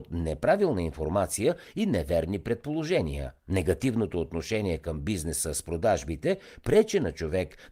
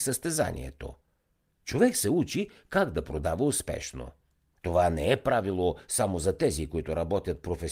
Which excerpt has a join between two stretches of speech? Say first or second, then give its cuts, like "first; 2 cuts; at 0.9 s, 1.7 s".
first; 1 cut; at 3.4 s